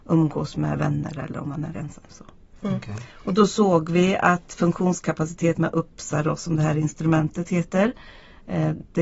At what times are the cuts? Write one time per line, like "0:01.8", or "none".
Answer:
0:01.7
0:05.5